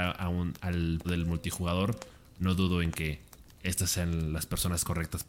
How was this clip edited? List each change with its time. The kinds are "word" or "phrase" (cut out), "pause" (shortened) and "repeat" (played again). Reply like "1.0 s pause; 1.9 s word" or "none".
1.0 s word

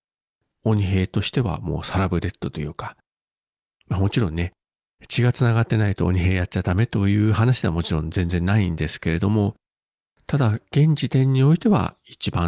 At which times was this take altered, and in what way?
none

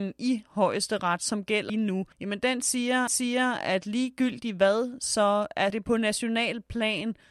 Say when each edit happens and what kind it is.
1.7 s word; 2.1 s pause; 3.1 s repeat; 5.7 s word

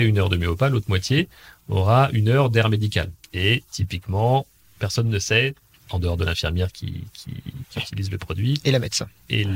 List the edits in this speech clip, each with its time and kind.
3.2 s pause

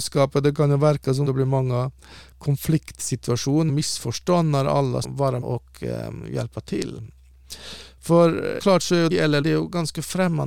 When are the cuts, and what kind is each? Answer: 1.3 s word; 3.7 s word; 5.0 s word; 5.4 s word; 8.6 s word; 9.1 s word; 9.4 s word

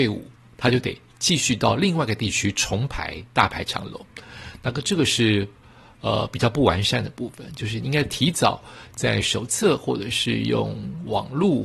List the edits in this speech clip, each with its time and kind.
none

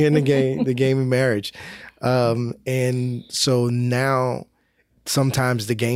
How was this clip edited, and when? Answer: none

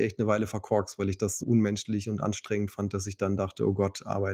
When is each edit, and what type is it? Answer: 1.4 s word

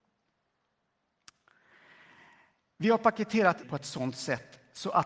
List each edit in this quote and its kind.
3.6 s word

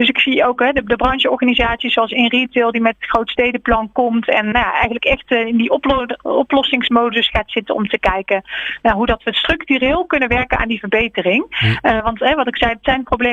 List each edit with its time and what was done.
4.5 s word

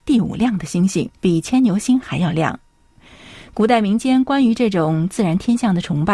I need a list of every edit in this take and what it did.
1.2 s pause

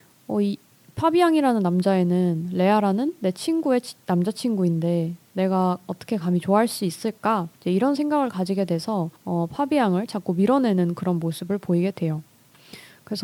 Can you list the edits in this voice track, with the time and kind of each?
7.6 s pause; 9.2 s pause

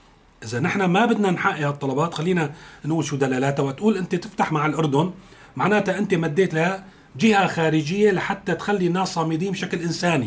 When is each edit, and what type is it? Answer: 4.5 s word; 6.5 s word

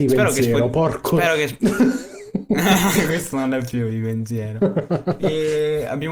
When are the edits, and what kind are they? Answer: 3.1 s word

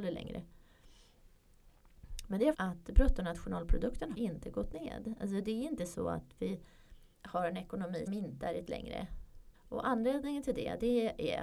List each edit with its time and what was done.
2.5 s phrase; 4.1 s word; 7.1 s pause; 8.1 s word; 8.7 s word; 9.5 s pause

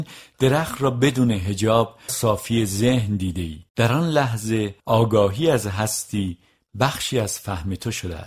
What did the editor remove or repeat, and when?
2.1 s word; 3.7 s pause; 4.8 s pause

